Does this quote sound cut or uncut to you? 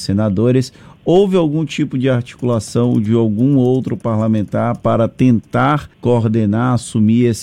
cut